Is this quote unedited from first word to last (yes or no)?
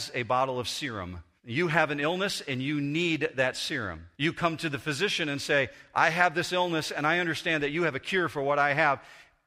no